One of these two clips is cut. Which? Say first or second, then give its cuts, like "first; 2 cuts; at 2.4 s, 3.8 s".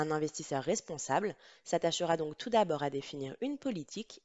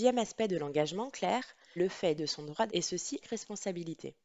second; 4 cuts; at 1.8 s, 2.2 s, 2.7 s, 3.2 s